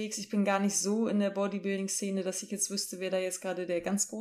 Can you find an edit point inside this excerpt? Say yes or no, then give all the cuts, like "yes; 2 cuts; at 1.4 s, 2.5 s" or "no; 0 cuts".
no; 0 cuts